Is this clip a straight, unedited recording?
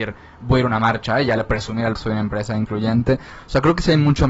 no; 2 cuts; at 1.5 s, 1.9 s

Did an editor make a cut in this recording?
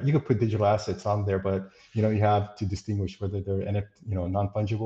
no; 0 cuts

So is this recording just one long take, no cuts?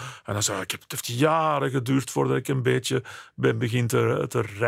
yes; 0 cuts

